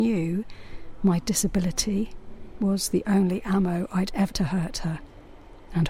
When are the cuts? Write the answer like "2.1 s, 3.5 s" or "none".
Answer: 4.3 s